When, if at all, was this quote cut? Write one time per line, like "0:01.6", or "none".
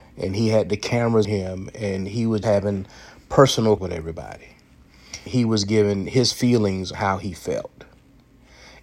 0:01.2
0:02.4
0:03.8
0:05.3
0:06.9